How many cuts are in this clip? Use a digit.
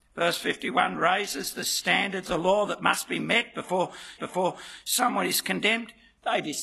2